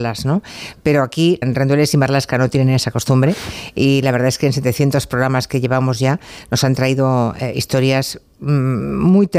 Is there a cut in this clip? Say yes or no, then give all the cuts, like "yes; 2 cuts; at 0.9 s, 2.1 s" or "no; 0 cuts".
yes; 1 cut; at 1.4 s